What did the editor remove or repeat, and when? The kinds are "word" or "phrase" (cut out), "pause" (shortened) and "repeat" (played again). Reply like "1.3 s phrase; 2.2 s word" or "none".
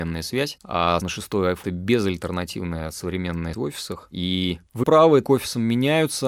1.0 s word; 1.6 s word; 3.5 s word; 4.8 s word; 5.2 s word

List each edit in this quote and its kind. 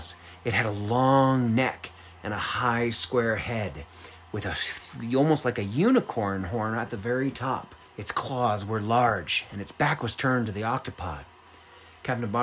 7.8 s pause

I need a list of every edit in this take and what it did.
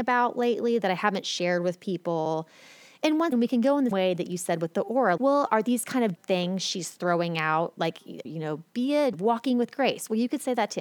3.3 s word; 3.9 s word; 5.2 s word; 6.1 s word; 8.2 s word; 9.1 s word

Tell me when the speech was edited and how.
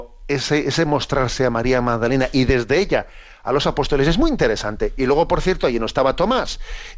none

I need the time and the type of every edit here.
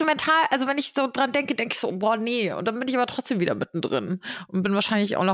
none

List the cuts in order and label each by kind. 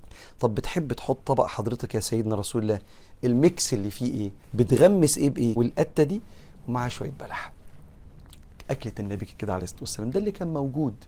1.2 s word; 4.4 s pause; 5.6 s phrase

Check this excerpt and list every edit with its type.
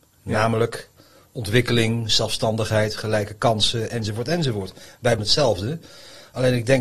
5.2 s word

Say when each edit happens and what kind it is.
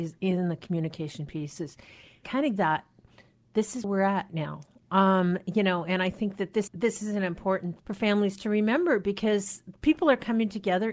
2.2 s word; 2.6 s word; 3.8 s word; 4.3 s word; 6.7 s word; 7.8 s word

